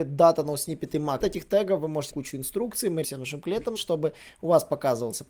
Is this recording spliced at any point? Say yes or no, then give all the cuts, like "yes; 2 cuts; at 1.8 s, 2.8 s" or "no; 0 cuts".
yes; 4 cuts; at 1.2 s, 2.1 s, 3.0 s, 3.7 s